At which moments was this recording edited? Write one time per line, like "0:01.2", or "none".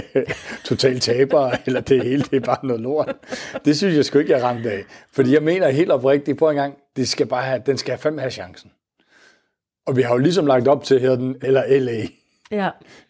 0:11.4